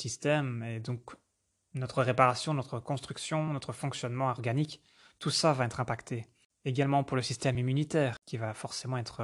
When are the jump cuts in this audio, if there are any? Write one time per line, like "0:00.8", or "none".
none

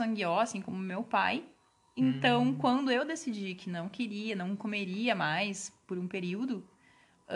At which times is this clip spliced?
none

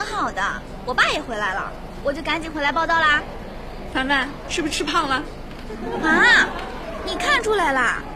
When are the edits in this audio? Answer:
0:04.4

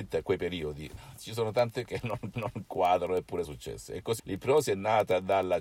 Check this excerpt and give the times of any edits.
0:01.9
0:02.3
0:03.4
0:04.2

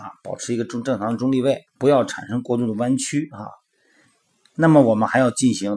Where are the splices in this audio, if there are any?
0:01.7

